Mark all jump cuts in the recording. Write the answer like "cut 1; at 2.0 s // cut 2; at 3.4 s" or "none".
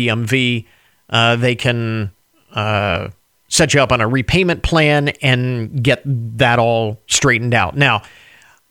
none